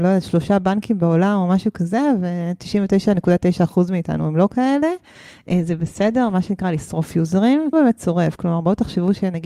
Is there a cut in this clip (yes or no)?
yes